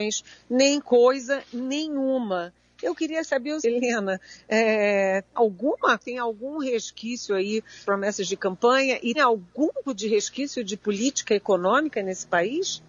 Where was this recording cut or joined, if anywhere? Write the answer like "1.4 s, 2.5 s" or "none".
3.6 s, 5.4 s, 6.0 s, 7.8 s, 9.1 s, 9.8 s